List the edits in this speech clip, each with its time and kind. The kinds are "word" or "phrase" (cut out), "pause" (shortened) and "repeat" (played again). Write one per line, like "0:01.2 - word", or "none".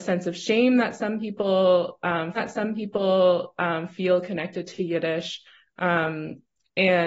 0:02.4 - repeat